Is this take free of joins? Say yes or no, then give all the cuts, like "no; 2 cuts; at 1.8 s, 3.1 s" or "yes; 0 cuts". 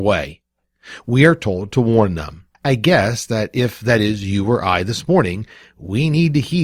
no; 1 cut; at 2.5 s